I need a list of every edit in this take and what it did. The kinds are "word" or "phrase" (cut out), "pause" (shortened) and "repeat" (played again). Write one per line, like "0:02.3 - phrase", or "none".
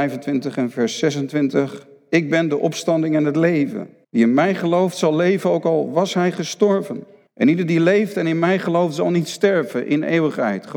0:04.0 - pause
0:07.3 - pause